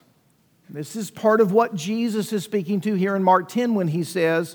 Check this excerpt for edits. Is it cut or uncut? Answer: uncut